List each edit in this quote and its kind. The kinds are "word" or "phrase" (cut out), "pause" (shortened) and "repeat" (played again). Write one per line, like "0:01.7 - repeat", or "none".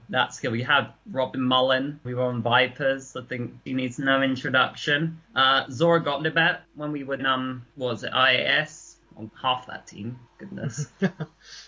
0:02.0 - word
0:03.7 - word
0:05.2 - pause
0:06.6 - pause
0:07.2 - word
0:07.7 - pause
0:09.3 - phrase
0:10.3 - pause